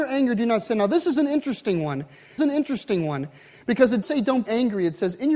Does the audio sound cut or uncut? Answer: cut